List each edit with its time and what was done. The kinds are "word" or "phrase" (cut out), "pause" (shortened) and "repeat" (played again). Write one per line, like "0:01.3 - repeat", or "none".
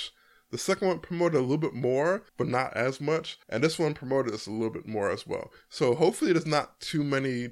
0:02.3 - pause
0:03.4 - pause